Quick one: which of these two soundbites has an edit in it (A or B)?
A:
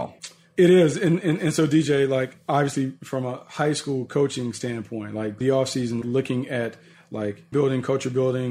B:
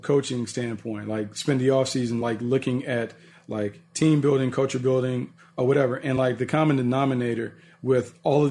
A